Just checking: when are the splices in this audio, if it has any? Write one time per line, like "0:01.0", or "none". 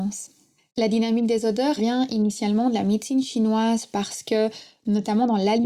0:01.8

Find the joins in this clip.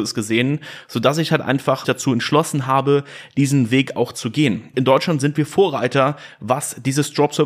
0:01.8
0:04.7

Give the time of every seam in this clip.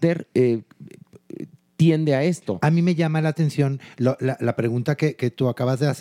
none

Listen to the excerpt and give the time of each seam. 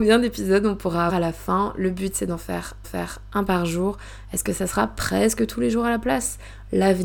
0:01.1
0:02.8

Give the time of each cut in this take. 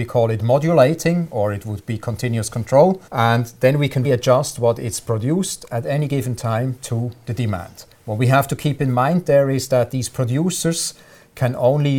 0:03.1
0:04.0
0:07.9

